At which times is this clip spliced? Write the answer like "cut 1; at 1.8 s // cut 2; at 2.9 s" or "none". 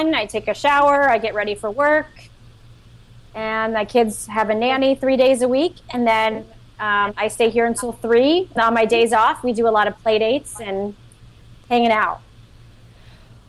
cut 1; at 8.6 s